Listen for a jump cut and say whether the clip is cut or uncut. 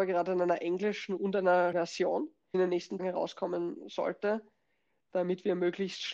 cut